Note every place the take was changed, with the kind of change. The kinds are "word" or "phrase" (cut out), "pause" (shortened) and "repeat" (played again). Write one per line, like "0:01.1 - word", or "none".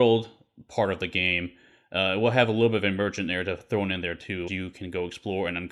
0:04.5 - word